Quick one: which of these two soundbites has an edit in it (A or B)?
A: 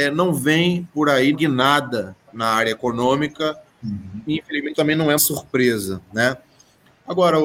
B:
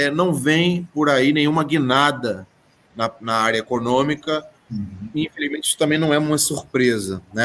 A